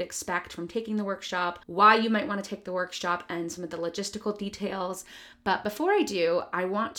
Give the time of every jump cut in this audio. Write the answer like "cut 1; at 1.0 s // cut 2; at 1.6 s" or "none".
cut 1; at 1.6 s